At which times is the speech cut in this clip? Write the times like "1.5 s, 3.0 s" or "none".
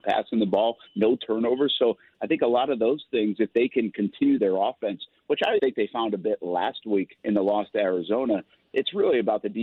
4.4 s, 5.6 s, 7.1 s